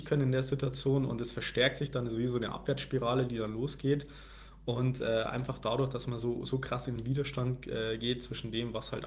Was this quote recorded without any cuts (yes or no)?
yes